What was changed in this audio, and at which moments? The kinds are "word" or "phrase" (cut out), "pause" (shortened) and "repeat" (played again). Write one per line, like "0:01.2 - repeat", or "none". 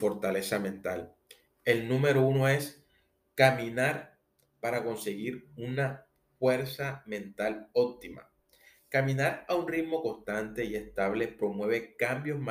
none